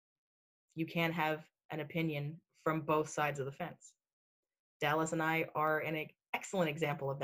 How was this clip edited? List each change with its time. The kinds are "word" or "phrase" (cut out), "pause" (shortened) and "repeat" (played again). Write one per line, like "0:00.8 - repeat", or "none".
none